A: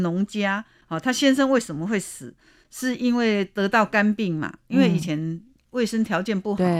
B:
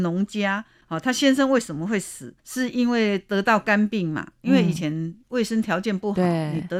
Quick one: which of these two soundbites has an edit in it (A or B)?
B